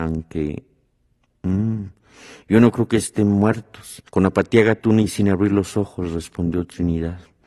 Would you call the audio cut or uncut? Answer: cut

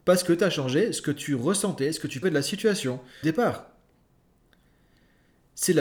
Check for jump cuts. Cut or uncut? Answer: cut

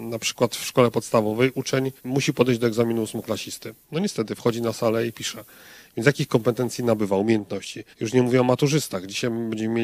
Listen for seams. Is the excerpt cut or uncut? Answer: cut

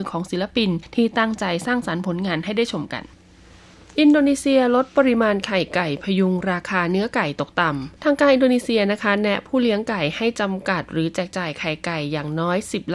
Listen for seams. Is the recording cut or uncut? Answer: cut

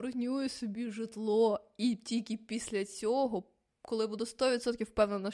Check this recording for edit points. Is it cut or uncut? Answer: uncut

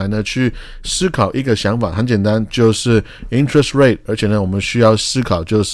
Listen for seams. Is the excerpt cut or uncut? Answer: uncut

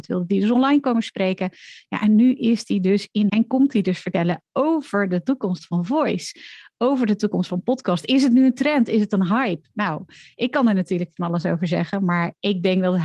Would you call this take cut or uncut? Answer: cut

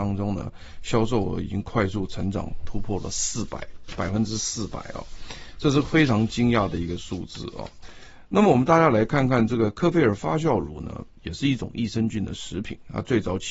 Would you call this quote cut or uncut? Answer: cut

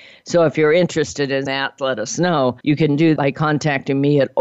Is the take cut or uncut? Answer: cut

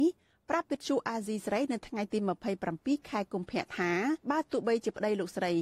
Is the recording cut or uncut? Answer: cut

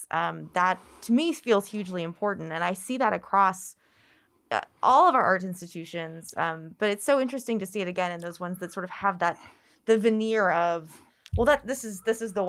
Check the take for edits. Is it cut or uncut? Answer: uncut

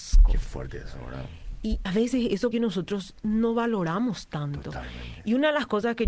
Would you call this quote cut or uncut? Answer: cut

